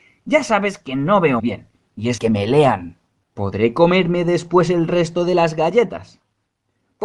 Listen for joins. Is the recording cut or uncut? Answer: cut